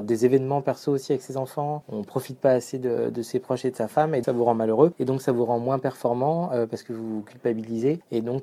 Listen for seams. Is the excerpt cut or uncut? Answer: cut